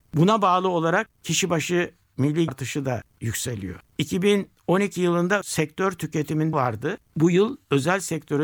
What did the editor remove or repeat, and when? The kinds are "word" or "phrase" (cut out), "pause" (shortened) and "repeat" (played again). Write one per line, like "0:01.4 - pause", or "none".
0:02.5 - word
0:05.4 - word
0:06.5 - word